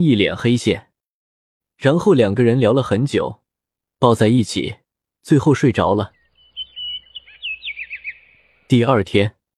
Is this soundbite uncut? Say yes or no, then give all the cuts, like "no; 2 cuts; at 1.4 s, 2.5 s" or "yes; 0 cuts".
yes; 0 cuts